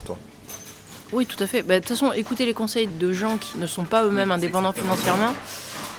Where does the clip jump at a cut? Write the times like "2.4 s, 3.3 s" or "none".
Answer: 2.9 s, 3.5 s